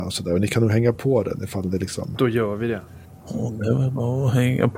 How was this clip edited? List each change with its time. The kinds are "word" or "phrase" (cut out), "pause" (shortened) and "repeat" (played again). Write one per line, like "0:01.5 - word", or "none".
none